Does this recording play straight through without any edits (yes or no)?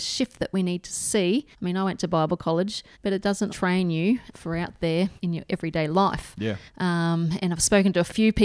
no